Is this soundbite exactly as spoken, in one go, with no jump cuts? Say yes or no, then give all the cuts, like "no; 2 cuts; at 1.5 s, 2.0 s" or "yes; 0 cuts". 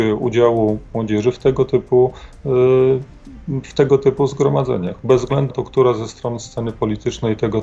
no; 2 cuts; at 0.9 s, 5.5 s